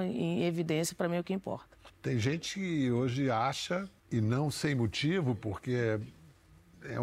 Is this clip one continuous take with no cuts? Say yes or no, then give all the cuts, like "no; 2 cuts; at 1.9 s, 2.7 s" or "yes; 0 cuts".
no; 1 cut; at 4.0 s